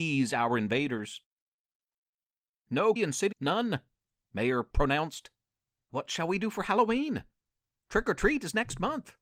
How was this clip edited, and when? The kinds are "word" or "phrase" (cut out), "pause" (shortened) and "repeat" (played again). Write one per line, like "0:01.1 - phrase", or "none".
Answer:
0:03.0 - word
0:03.3 - word
0:04.7 - word
0:05.9 - word